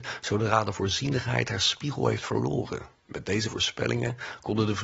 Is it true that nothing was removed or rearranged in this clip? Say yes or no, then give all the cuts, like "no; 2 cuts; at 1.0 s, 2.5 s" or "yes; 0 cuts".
no; 1 cut; at 3.0 s